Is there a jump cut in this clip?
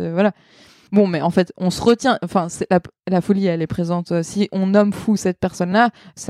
no; 0 cuts

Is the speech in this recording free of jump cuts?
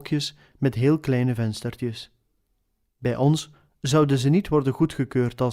yes; 0 cuts

